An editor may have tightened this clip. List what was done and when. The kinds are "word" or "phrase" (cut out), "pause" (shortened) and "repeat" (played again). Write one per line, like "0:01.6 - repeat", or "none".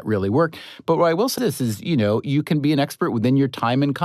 0:01.4 - word